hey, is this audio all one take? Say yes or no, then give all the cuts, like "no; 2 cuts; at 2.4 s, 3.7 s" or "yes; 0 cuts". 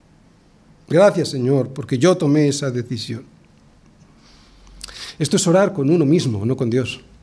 yes; 0 cuts